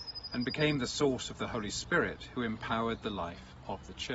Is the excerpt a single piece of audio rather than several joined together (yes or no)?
yes